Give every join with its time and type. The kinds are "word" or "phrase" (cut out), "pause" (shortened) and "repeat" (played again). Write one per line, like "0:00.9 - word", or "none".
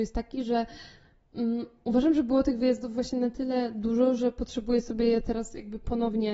none